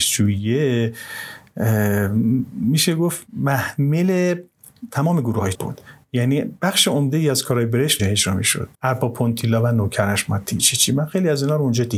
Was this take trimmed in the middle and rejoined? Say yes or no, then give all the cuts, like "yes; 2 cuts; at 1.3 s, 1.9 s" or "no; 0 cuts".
yes; 4 cuts; at 5.5 s, 8.0 s, 8.7 s, 10.6 s